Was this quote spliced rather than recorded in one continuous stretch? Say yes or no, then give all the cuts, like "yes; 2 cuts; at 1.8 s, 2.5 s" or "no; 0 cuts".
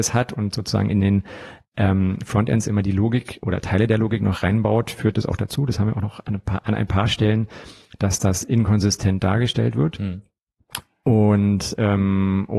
no; 0 cuts